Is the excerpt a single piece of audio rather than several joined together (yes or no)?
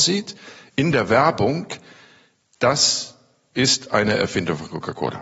yes